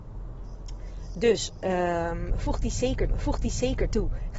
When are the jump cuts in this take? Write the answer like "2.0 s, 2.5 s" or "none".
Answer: 3.1 s